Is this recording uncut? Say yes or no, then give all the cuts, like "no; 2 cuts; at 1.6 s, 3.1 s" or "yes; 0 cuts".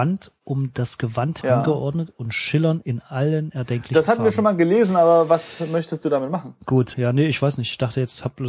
no; 2 cuts; at 1.4 s, 6.9 s